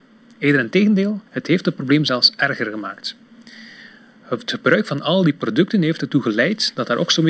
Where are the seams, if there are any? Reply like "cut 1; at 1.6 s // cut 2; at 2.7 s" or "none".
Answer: cut 1; at 1.3 s